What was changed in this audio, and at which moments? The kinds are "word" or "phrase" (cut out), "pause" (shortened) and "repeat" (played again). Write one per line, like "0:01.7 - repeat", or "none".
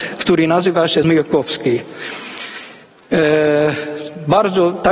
0:01.0 - word